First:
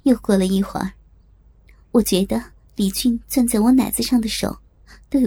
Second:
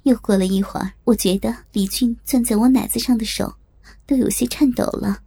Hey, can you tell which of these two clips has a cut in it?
second; 2 cuts; at 1.0 s, 1.6 s

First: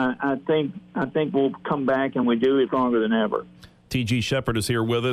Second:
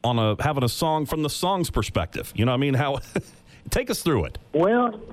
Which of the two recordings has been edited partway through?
first; 2 cuts; at 2.2 s, 2.7 s

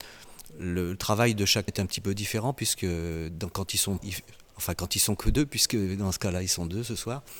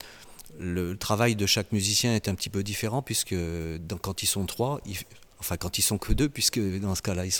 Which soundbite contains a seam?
first; 2 cuts; at 1.7 s, 4.0 s

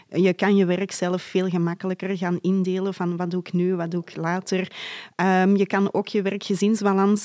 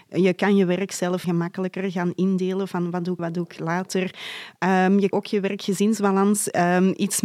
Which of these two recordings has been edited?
second; 3 cuts; at 1.2 s, 3.2 s, 5.1 s

